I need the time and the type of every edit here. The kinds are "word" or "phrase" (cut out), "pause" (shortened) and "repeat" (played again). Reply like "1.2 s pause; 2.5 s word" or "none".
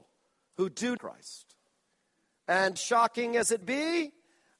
1.0 s phrase; 2.8 s word; 3.6 s word